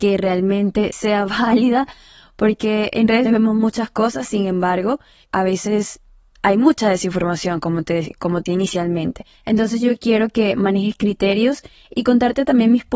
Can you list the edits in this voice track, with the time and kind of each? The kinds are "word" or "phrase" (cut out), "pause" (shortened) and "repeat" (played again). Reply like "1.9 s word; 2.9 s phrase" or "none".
0.9 s word; 3.2 s word; 5.2 s word; 8.5 s word